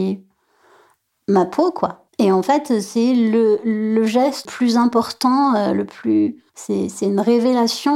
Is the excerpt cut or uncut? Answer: cut